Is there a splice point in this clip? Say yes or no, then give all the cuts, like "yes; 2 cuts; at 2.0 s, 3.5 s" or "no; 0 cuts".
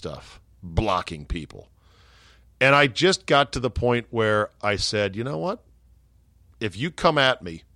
no; 0 cuts